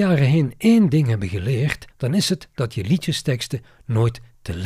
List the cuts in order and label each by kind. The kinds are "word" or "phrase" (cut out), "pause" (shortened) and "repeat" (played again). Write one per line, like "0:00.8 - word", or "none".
0:01.9 - pause